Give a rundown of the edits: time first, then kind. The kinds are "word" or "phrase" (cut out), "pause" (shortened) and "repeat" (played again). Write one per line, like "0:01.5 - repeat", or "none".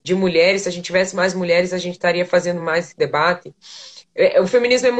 none